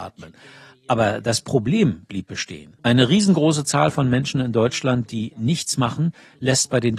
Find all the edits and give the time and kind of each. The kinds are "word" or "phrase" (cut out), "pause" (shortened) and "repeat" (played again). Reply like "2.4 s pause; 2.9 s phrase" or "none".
2.8 s pause